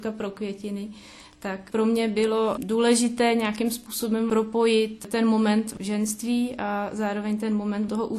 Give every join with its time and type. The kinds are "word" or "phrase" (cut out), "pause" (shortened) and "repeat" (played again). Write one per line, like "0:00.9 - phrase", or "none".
none